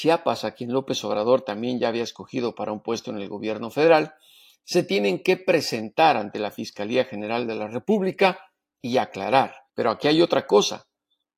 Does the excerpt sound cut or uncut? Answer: cut